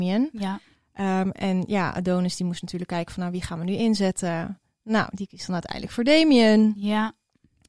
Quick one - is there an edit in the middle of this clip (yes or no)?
no